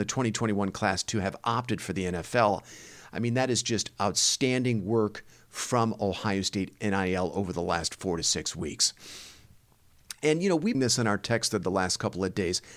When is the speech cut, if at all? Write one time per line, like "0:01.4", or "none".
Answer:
0:10.7